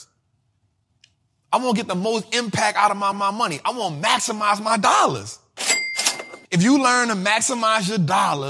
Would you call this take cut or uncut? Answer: cut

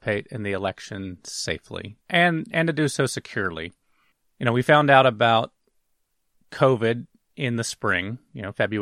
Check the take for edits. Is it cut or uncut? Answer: cut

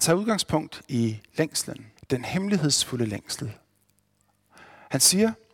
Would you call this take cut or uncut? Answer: cut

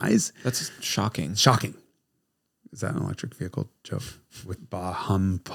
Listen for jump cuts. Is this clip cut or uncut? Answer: cut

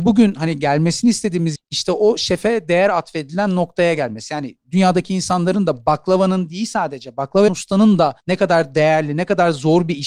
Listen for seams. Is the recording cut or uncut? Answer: cut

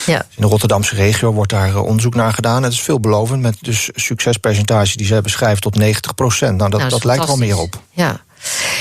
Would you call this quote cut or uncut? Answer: cut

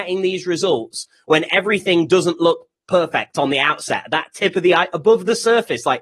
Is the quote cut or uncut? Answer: uncut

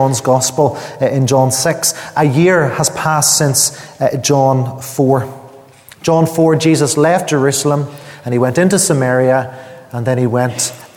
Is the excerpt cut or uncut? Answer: uncut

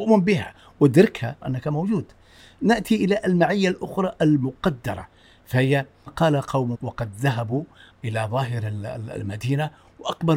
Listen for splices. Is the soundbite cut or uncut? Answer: cut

